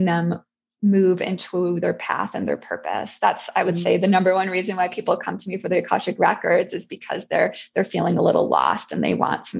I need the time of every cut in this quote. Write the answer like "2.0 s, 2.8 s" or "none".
none